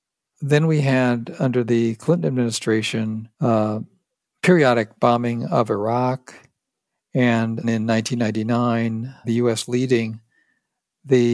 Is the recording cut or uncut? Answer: cut